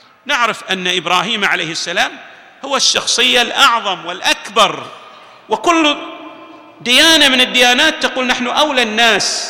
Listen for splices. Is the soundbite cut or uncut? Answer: uncut